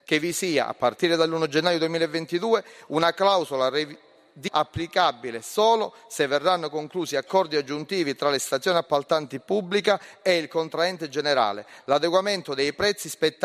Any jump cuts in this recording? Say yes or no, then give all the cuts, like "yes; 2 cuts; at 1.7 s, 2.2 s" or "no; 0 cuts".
yes; 1 cut; at 4.5 s